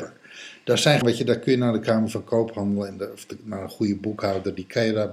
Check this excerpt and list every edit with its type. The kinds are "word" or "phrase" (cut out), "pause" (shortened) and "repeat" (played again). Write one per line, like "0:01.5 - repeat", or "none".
0:01.0 - word